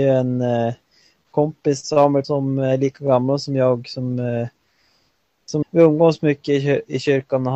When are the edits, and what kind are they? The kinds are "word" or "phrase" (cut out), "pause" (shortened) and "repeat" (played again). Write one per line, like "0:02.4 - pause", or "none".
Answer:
0:02.2 - word
0:05.6 - word